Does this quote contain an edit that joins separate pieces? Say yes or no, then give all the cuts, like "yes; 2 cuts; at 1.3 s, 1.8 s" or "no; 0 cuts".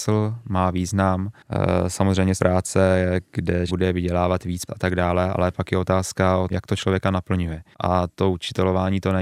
yes; 4 cuts; at 2.4 s, 3.7 s, 4.7 s, 6.5 s